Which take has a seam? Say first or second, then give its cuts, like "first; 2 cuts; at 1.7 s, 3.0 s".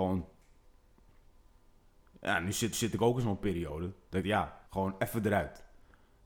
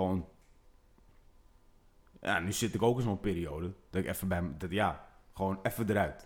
first; 3 cuts; at 2.7 s, 4.2 s, 4.7 s